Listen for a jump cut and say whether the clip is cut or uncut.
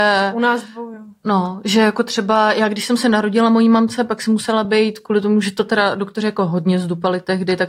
uncut